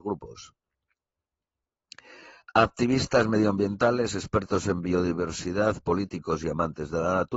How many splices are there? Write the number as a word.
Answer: zero